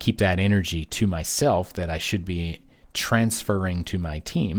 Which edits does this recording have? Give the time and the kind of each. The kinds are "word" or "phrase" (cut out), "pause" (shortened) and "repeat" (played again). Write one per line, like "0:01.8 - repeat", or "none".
none